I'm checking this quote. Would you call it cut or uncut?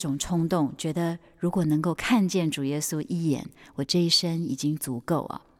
uncut